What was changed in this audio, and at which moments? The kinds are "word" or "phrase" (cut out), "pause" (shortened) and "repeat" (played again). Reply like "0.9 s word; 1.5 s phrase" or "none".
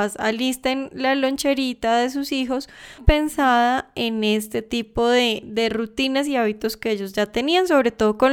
3.0 s word